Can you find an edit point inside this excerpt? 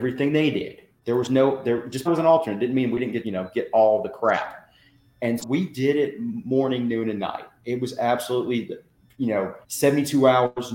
yes; 4 cuts; at 2.1 s, 3.2 s, 5.4 s, 9.6 s

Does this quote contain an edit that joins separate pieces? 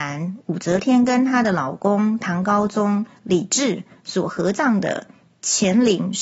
no; 0 cuts

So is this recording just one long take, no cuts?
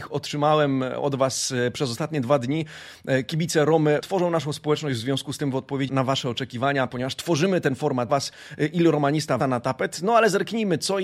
no; 4 cuts; at 4.0 s, 5.9 s, 8.1 s, 9.4 s

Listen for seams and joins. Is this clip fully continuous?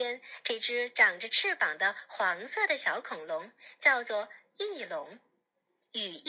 yes; 0 cuts

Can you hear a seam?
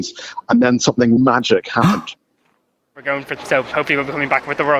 yes; 2 cuts; at 1.2 s, 3.4 s

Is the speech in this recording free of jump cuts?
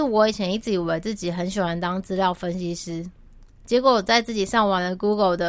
no; 1 cut; at 3.4 s

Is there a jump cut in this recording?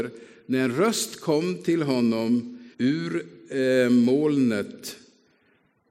yes; 1 cut; at 2.7 s

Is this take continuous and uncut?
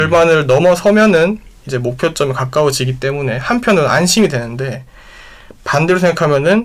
yes; 0 cuts

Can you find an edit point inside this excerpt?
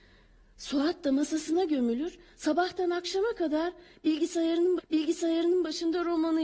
yes; 1 cut; at 4.8 s

